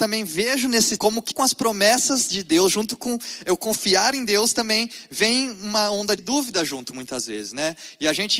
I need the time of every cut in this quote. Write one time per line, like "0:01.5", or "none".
0:01.0
0:01.3
0:06.2